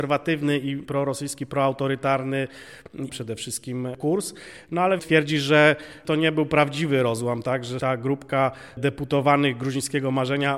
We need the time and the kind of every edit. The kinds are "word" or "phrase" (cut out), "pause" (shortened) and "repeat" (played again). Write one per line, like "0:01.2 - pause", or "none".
0:03.1 - word
0:05.0 - phrase
0:07.8 - word